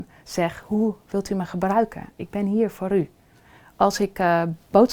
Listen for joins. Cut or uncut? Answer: uncut